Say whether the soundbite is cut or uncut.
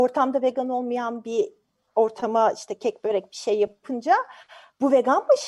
uncut